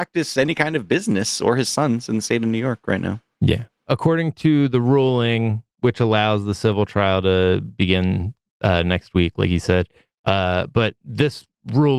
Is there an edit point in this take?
no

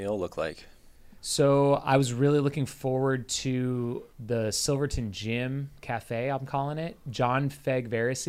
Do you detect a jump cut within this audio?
yes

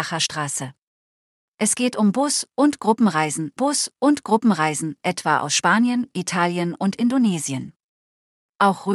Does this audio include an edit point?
yes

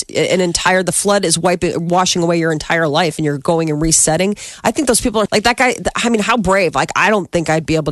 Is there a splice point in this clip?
yes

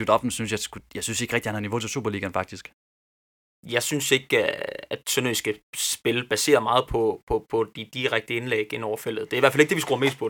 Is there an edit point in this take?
no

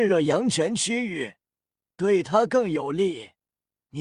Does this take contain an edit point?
no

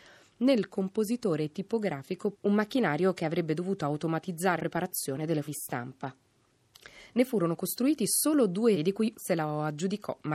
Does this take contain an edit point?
yes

